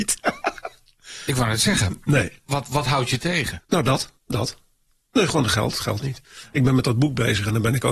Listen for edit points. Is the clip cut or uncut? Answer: cut